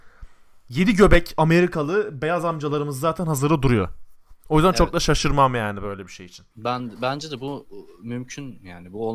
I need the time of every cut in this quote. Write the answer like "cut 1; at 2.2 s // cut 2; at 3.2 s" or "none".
cut 1; at 4.4 s // cut 2; at 6.5 s